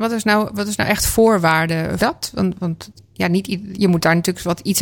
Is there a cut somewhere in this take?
yes; 2 cuts; at 2.0 s, 3.8 s

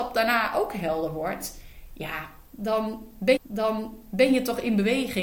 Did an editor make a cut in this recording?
yes; 1 cut; at 3.4 s

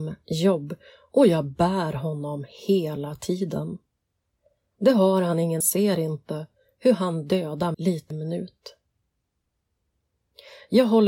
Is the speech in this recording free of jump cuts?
no; 3 cuts; at 5.6 s, 7.7 s, 8.1 s

